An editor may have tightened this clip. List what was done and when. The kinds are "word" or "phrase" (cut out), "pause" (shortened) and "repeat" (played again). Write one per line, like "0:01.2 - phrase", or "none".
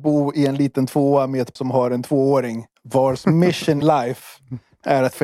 0:01.6 - word
0:02.7 - pause
0:03.8 - word